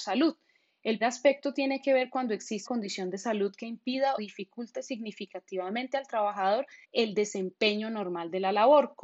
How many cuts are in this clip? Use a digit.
4